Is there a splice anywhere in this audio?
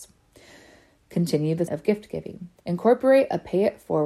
yes; 2 cuts; at 1.7 s, 2.6 s

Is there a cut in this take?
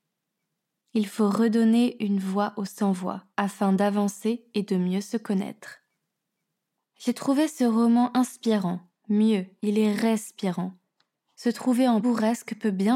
yes; 2 cuts; at 3.3 s, 12.0 s

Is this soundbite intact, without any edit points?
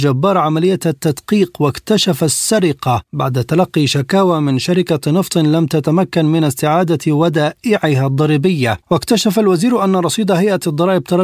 no; 1 cut; at 8.8 s

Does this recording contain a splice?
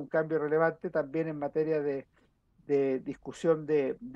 no; 0 cuts

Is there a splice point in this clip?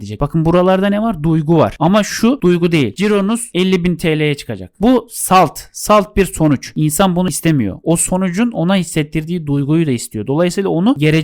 no; 0 cuts

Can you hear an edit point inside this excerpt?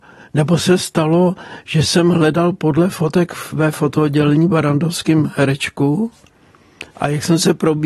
yes; 1 cut; at 6.9 s

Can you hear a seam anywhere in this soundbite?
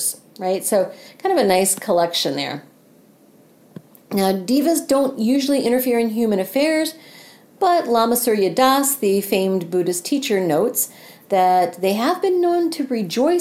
no; 0 cuts

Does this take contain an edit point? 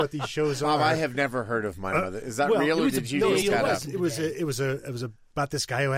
yes; 1 cut; at 3.4 s

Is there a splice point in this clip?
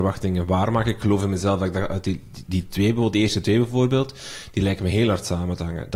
no; 0 cuts

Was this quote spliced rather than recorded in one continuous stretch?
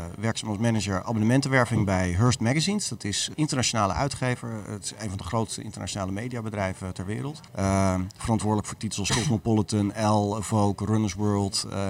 yes; 2 cuts; at 3.3 s, 7.5 s

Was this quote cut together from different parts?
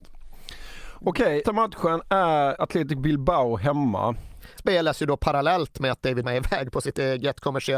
yes; 4 cuts; at 1.4 s, 2.6 s, 4.6 s, 6.2 s

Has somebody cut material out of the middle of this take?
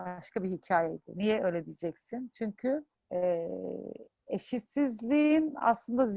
yes; 1 cut; at 2.9 s

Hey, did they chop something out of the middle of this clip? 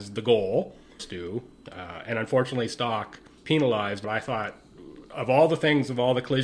yes; 3 cuts; at 1.0 s, 3.4 s, 4.0 s

